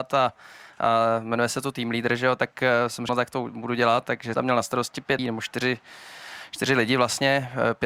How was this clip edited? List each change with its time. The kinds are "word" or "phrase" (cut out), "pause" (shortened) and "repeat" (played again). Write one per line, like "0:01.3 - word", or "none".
0:03.1 - word
0:04.3 - word
0:05.2 - word